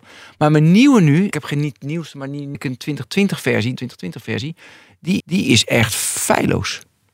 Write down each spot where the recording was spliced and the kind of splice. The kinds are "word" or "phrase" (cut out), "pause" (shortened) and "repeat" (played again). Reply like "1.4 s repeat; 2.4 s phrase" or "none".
1.3 s word; 2.5 s word; 3.8 s word; 5.2 s repeat

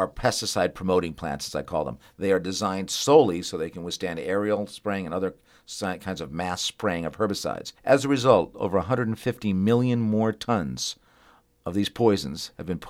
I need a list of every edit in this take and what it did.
7.8 s pause

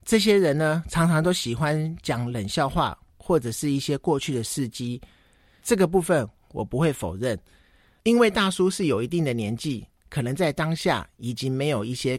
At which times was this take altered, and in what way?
none

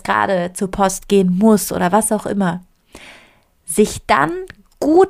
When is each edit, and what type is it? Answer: none

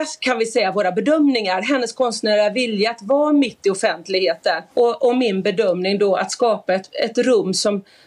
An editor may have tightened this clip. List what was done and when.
4.7 s pause

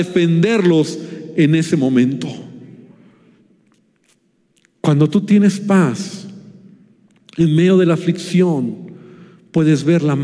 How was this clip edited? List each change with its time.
none

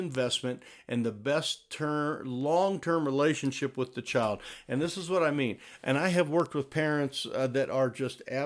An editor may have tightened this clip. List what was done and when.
none

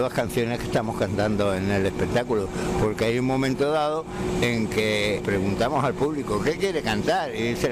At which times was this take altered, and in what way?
5.2 s phrase

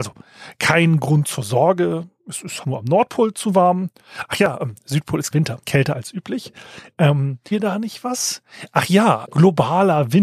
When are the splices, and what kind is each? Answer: 2.6 s word; 5.3 s word; 5.6 s phrase; 7.5 s word; 9.2 s word

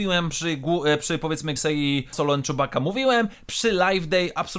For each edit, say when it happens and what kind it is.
1.6 s word; 2.1 s word

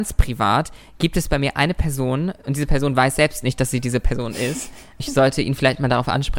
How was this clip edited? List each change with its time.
5.0 s word

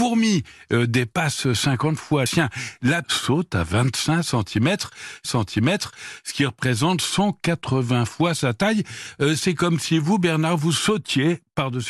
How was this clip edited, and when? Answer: 2.3 s word; 3.0 s word; 5.2 s repeat

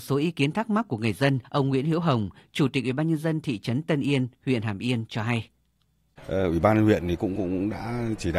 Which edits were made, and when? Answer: 1.4 s pause

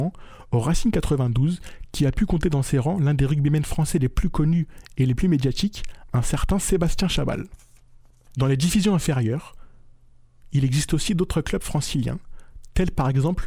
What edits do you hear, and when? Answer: none

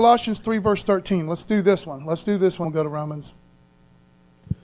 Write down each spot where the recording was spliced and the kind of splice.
2.6 s word

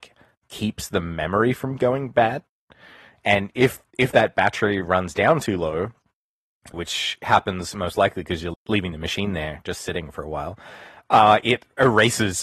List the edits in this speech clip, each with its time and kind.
6.7 s word; 8.5 s word

